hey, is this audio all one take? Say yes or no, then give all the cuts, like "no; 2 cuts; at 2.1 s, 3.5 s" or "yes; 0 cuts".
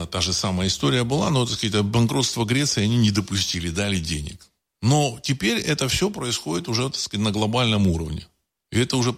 yes; 0 cuts